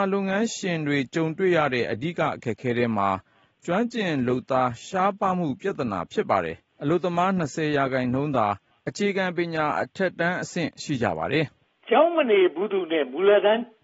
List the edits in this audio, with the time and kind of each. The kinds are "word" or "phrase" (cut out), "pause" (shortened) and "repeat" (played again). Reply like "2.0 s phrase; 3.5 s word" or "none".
11.6 s pause